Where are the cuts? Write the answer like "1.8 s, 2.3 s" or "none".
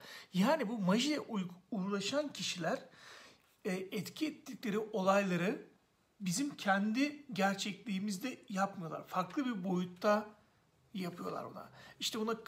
none